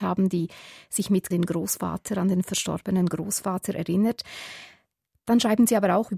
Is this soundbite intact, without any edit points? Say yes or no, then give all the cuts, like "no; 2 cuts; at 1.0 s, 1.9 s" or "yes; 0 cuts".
no; 1 cut; at 1.3 s